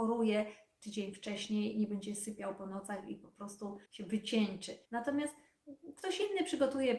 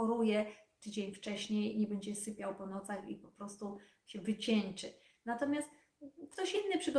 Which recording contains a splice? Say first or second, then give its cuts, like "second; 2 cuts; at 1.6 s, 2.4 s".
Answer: first; 2 cuts; at 3.9 s, 4.8 s